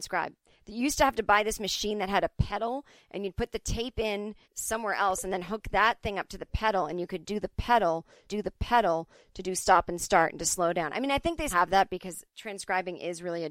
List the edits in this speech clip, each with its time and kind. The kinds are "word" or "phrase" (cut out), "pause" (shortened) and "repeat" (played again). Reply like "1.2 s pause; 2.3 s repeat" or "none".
4.4 s pause; 8.3 s repeat; 11.5 s word; 12.3 s pause